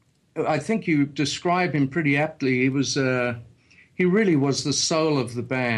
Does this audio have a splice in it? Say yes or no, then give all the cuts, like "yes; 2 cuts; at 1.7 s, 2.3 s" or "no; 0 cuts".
no; 0 cuts